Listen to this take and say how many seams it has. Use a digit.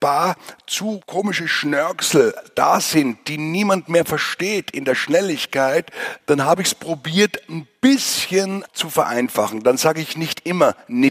0